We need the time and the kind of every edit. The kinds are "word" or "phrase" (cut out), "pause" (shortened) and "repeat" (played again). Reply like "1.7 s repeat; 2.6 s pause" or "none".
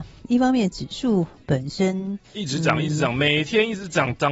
2.2 s pause